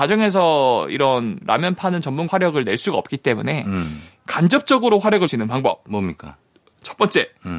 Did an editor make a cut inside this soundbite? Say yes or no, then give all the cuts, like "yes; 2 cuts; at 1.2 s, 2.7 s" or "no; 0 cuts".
yes; 2 cuts; at 2.3 s, 5.3 s